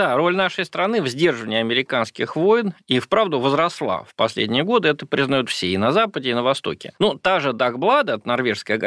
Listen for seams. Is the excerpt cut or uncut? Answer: uncut